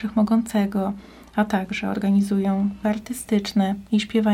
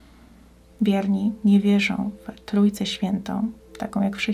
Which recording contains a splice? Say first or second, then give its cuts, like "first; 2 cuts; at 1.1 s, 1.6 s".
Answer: first; 1 cut; at 2.8 s